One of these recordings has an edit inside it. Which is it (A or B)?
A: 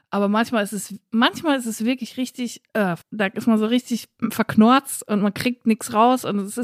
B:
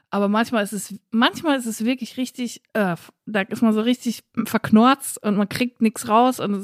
A